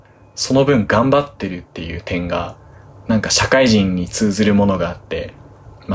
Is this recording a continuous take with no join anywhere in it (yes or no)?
yes